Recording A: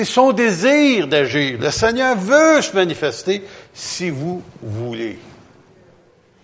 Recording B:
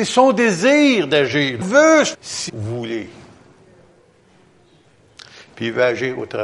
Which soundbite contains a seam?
B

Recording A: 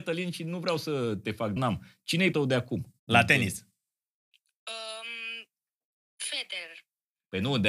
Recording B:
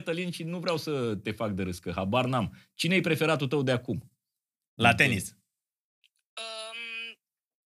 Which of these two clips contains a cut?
A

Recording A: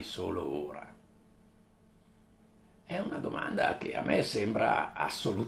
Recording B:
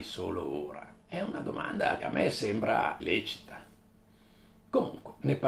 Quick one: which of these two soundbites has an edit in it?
B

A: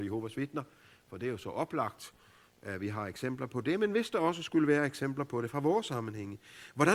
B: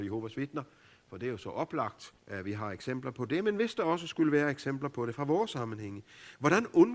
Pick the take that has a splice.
B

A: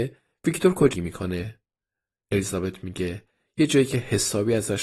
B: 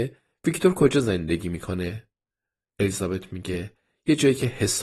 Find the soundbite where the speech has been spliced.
A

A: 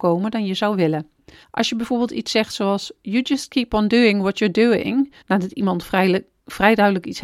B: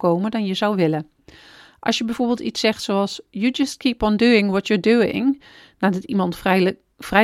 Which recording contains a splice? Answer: A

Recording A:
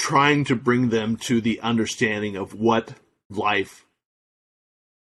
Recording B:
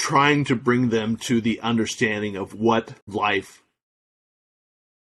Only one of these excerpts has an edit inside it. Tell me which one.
B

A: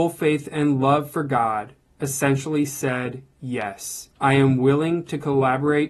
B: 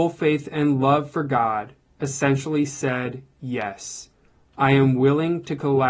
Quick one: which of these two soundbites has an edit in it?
A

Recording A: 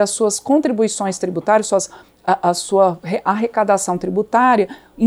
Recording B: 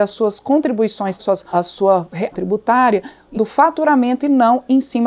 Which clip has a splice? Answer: B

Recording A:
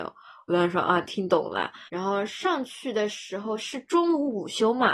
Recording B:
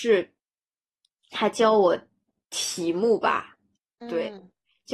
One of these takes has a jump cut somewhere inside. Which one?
A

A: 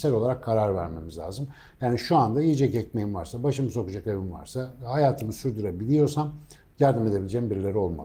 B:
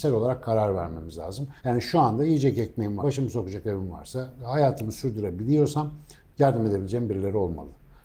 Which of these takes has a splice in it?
B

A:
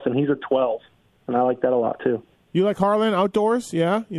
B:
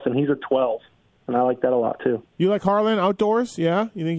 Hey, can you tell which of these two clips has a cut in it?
B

